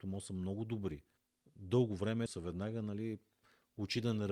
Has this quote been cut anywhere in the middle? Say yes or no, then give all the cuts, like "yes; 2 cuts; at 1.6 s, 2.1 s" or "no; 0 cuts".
yes; 2 cuts; at 1.2 s, 2.3 s